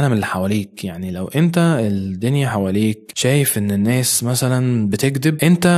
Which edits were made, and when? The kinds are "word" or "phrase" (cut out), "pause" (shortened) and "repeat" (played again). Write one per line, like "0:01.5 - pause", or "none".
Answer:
none